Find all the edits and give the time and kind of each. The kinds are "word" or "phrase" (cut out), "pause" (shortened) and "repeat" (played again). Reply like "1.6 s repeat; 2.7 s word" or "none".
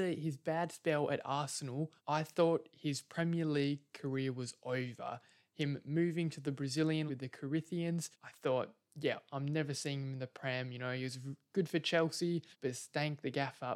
2.0 s pause; 7.1 s word; 8.1 s pause; 12.5 s pause

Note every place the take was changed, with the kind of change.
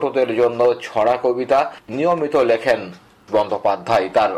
1.9 s word; 3.3 s word

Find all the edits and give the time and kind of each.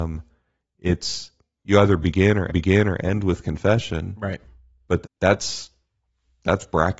1.6 s word; 2.5 s repeat; 5.0 s word

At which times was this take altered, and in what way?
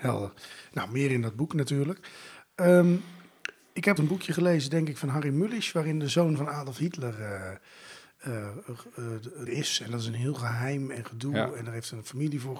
4.0 s word; 9.5 s word

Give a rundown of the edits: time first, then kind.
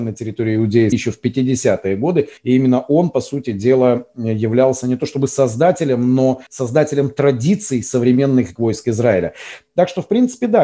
0.9 s word; 2.4 s pause; 6.5 s pause; 8.6 s word

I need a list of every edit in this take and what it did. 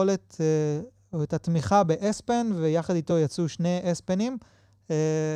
none

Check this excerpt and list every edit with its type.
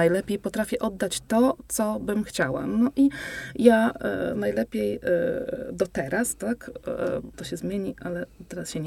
7.3 s word

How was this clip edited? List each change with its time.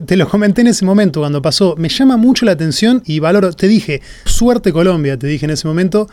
3.0 s word; 4.3 s word

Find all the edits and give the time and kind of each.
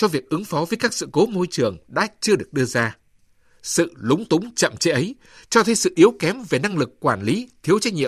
none

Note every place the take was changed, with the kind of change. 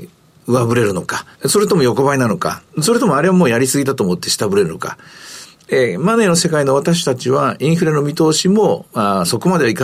1.3 s pause; 2.7 s pause

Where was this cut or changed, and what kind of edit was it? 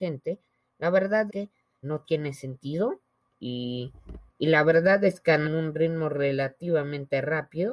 1.3 s word; 1.8 s word; 4.3 s pause; 5.4 s word

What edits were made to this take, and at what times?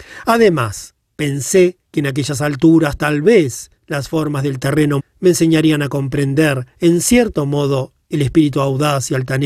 1.8 s pause; 3.8 s pause; 5.0 s word; 6.7 s pause

